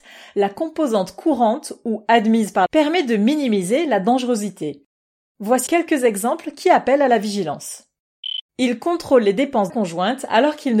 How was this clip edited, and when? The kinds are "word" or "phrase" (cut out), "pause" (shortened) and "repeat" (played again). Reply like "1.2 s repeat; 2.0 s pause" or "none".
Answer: 2.7 s phrase; 5.7 s word; 8.5 s pause; 9.7 s phrase

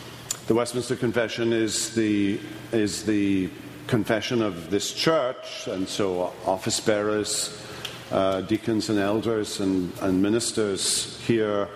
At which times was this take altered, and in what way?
9.9 s word

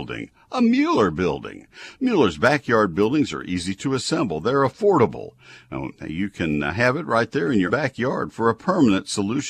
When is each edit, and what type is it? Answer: 7.7 s word

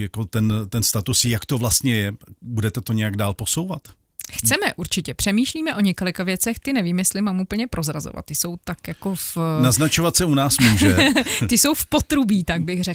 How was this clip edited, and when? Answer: none

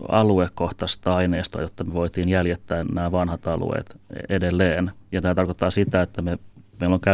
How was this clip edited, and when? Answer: none

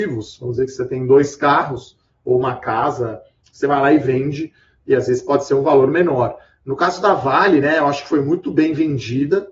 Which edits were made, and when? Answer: none

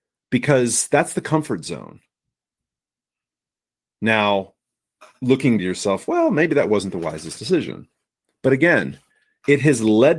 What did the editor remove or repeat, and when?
5.6 s phrase

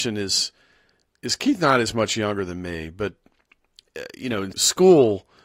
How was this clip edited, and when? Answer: 4.5 s word

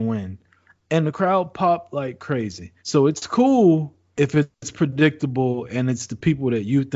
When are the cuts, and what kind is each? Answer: 2.8 s pause

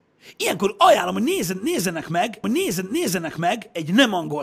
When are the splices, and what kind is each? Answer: 2.4 s repeat

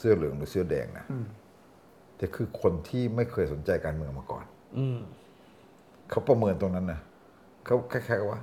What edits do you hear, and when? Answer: none

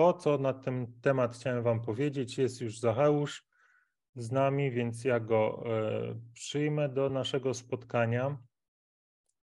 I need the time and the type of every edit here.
none

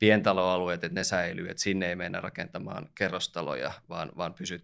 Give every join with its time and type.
none

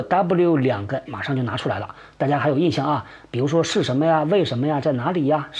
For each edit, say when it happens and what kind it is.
1.1 s word

